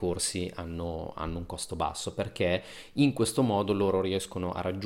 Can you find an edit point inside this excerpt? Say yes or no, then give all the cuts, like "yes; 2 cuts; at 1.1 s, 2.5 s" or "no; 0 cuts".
no; 0 cuts